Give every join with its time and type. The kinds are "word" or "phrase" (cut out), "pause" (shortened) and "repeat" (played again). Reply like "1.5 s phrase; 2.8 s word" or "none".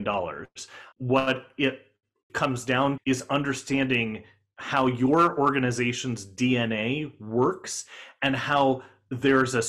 0.9 s word; 2.3 s word; 3.0 s word